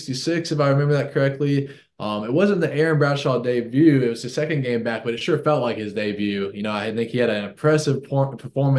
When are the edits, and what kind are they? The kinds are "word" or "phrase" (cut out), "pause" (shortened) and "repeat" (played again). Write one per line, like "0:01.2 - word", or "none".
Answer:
none